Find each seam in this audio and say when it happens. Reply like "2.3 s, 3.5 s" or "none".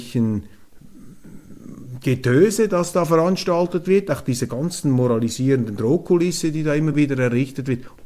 none